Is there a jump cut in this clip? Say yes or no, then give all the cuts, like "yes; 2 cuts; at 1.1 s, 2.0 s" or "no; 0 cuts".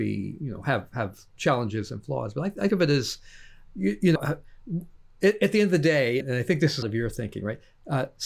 yes; 5 cuts; at 2.7 s, 3.7 s, 4.2 s, 6.2 s, 6.8 s